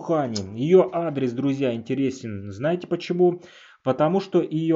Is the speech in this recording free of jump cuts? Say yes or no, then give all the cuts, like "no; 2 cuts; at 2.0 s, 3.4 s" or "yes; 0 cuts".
yes; 0 cuts